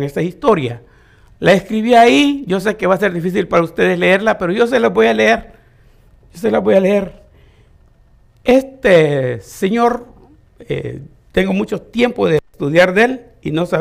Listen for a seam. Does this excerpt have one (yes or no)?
no